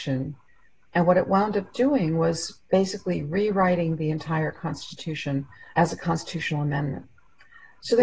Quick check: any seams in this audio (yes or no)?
yes